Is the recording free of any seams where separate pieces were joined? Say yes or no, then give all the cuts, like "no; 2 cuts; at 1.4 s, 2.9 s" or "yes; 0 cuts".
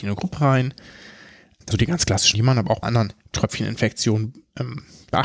no; 3 cuts; at 1.7 s, 2.3 s, 2.8 s